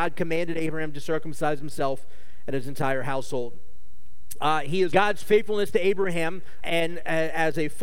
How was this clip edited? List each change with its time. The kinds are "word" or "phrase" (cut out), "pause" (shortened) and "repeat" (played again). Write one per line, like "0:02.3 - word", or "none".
0:04.9 - word
0:06.6 - word